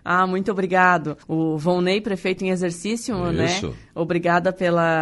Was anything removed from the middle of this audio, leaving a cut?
yes; 1 cut; at 1.2 s

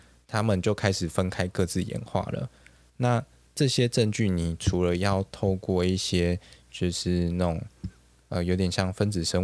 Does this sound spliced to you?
no; 0 cuts

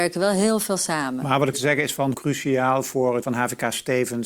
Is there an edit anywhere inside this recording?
yes; 3 cuts; at 1.5 s, 2.1 s, 3.2 s

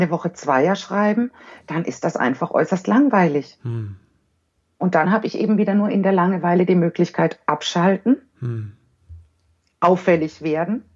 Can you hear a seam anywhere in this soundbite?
no; 0 cuts

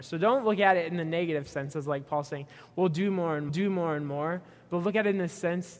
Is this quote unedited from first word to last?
no; 1 cut; at 3.5 s

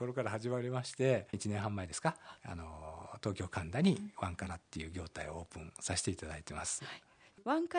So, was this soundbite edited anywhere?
yes; 1 cut; at 1.3 s

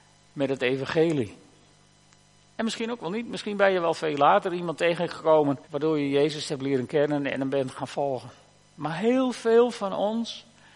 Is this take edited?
yes; 1 cut; at 5.6 s

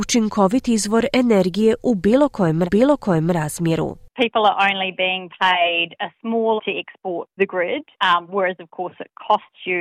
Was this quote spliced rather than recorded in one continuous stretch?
yes; 4 cuts; at 2.6 s, 6.6 s, 7.4 s, 7.9 s

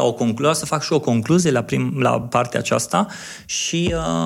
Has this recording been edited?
no; 0 cuts

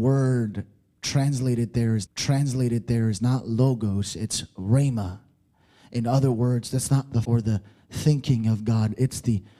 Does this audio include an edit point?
yes; 2 cuts; at 2.1 s, 7.2 s

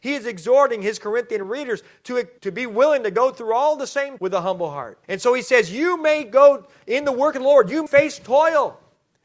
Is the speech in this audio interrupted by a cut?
yes; 4 cuts; at 2.4 s, 4.2 s, 5.0 s, 7.9 s

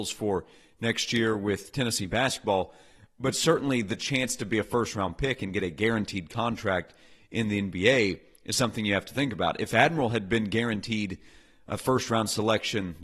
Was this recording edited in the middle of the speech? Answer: no; 0 cuts

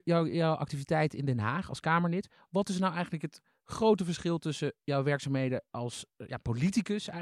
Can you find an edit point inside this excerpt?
no; 0 cuts

